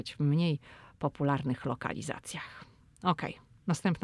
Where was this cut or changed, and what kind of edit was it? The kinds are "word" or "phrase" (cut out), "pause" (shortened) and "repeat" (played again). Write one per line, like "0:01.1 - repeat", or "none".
none